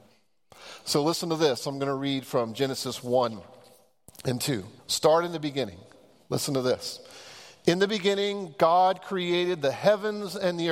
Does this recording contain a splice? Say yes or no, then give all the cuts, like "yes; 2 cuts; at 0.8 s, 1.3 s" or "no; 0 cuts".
yes; 1 cut; at 4.8 s